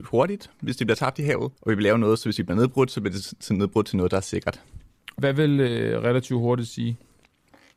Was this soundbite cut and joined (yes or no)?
yes